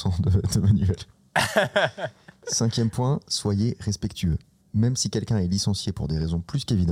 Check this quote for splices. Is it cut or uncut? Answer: uncut